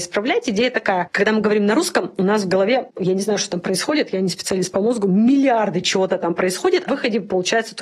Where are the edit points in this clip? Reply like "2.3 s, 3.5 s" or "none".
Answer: 6.9 s